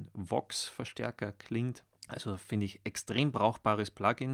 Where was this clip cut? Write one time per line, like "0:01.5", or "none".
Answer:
0:01.9